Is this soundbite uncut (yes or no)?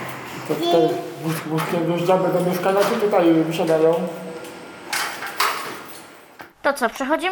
yes